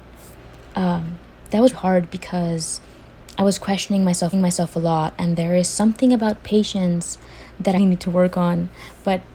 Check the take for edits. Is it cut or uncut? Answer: cut